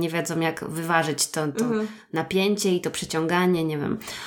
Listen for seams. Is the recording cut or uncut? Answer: uncut